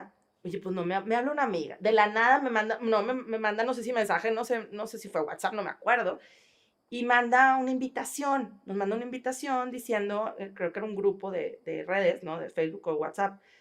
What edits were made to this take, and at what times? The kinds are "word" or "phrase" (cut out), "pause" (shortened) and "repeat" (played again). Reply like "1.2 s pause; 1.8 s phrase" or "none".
none